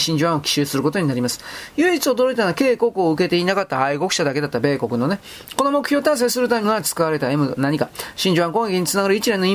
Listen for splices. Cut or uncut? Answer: cut